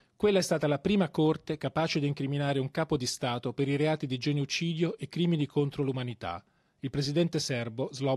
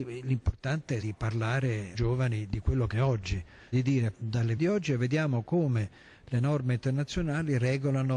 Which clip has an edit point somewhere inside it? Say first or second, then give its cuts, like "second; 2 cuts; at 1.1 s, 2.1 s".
second; 6 cuts; at 1.0 s, 1.9 s, 2.9 s, 3.7 s, 4.1 s, 4.6 s